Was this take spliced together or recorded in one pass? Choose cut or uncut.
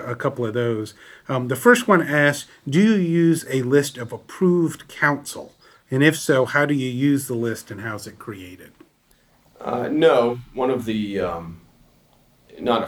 uncut